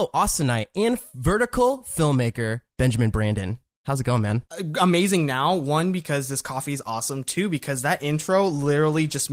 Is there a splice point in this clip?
no; 0 cuts

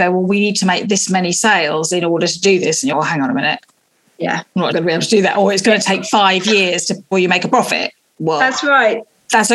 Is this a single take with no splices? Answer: no; 3 cuts; at 2.9 s, 4.7 s, 7.1 s

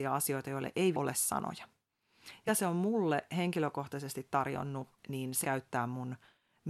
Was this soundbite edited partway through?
yes; 4 cuts; at 0.9 s, 2.5 s, 5.0 s, 5.4 s

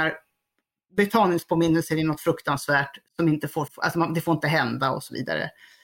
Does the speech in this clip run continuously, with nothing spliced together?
no; 2 cuts; at 3.1 s, 3.7 s

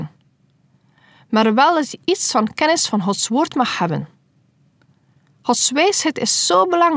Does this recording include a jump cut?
no; 0 cuts

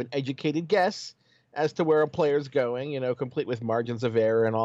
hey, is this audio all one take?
yes; 0 cuts

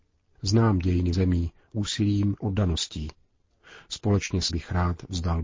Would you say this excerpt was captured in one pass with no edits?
no; 4 cuts; at 1.1 s, 1.7 s, 2.4 s, 4.5 s

